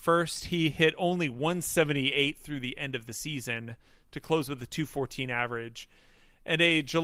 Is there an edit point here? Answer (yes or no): no